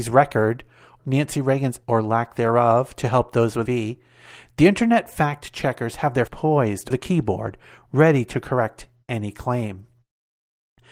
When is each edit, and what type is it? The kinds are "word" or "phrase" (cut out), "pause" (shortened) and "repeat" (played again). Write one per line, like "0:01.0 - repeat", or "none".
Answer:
0:01.0 - word
0:01.8 - word
0:03.7 - word
0:06.3 - word
0:06.9 - word